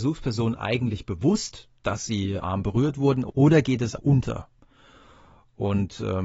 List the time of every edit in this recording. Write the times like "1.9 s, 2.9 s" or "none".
1.8 s, 2.4 s, 4.0 s